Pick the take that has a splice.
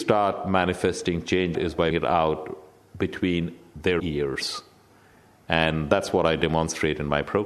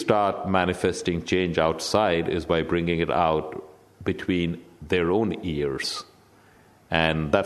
first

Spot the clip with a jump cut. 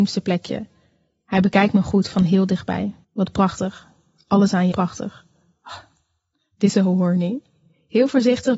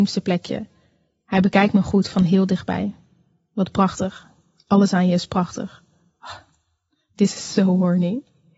first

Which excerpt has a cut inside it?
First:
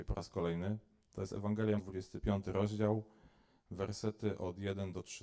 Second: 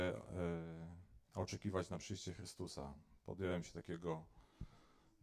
first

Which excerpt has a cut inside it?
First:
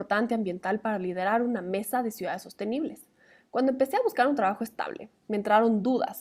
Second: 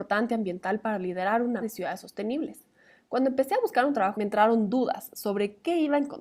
second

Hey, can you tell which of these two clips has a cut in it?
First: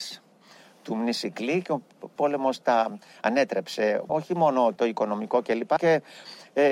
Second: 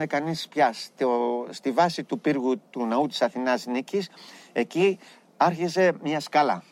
first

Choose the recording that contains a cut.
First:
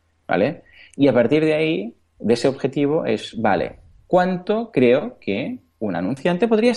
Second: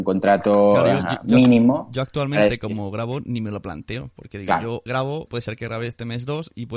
second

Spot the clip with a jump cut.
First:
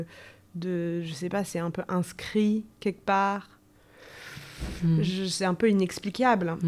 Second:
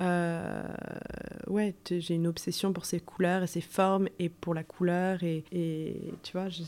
second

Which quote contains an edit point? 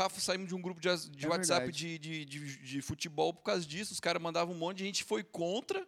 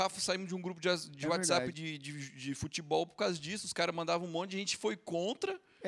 second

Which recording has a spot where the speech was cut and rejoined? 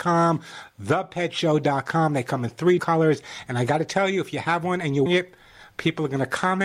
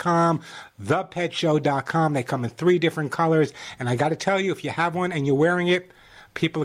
first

